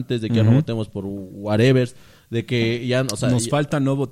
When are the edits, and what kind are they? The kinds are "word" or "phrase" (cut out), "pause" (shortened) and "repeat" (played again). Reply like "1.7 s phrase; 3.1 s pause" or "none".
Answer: none